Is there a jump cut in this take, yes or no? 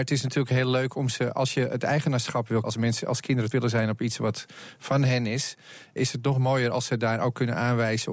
yes